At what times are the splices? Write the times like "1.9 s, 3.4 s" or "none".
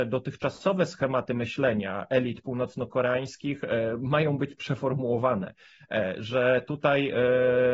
none